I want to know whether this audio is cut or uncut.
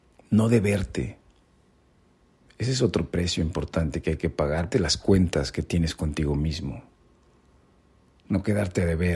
cut